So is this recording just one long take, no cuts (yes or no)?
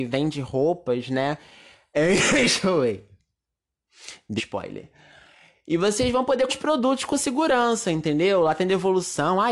no